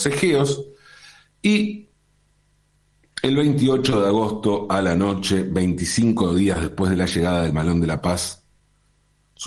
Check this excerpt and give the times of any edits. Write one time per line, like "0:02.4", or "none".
none

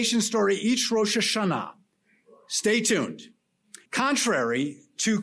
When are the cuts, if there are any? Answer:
0:03.9

